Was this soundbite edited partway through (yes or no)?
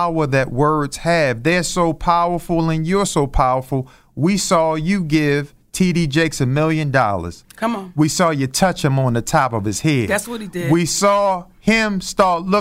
no